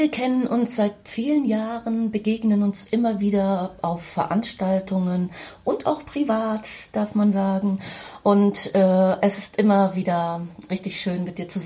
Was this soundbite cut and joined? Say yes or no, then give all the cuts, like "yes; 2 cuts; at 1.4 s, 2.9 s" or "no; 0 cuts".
no; 0 cuts